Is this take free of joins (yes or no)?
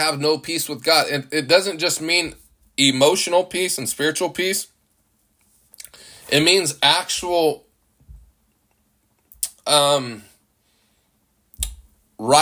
yes